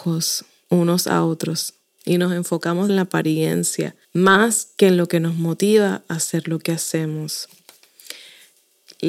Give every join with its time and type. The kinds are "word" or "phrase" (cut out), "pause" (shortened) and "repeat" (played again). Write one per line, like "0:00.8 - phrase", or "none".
0:02.9 - word
0:04.0 - pause

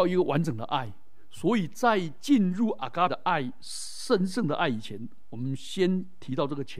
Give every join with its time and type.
0:03.1 - word

